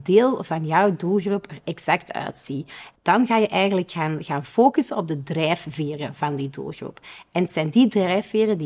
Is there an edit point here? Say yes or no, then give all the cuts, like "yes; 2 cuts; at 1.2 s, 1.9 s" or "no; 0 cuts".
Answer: no; 0 cuts